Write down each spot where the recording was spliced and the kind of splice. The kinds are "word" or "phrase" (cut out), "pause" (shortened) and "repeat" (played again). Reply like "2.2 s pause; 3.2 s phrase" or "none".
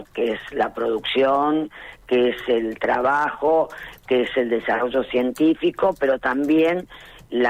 none

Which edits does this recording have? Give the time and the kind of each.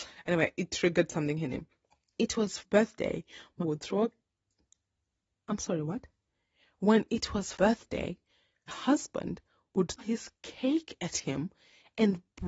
2.2 s word; 2.6 s word; 3.6 s word; 7.5 s word; 8.7 s word; 10.0 s word

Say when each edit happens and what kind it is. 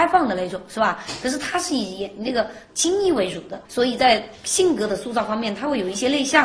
3.7 s pause

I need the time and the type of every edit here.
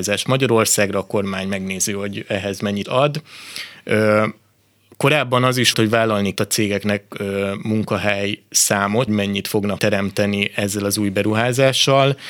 2.8 s word; 5.7 s word; 6.4 s word; 9.1 s word; 9.8 s word

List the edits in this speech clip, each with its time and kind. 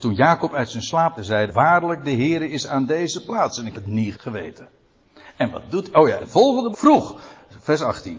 1.2 s word; 1.5 s word; 3.7 s word; 4.1 s word; 6.2 s word; 6.7 s word

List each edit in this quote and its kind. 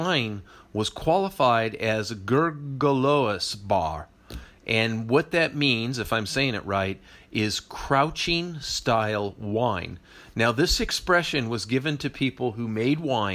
none

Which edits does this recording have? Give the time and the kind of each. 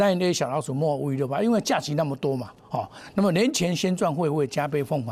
none

